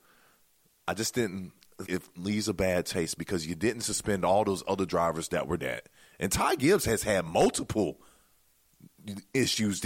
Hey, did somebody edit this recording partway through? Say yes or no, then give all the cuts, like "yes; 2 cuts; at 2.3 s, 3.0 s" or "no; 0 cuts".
yes; 2 cuts; at 1.8 s, 5.6 s